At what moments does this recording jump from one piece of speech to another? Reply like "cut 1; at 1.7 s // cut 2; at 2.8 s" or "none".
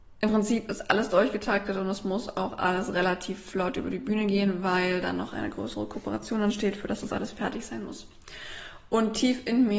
none